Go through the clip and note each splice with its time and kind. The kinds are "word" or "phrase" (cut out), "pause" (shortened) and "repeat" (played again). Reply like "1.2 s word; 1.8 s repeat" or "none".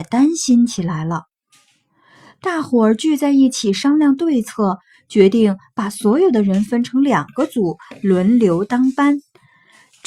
none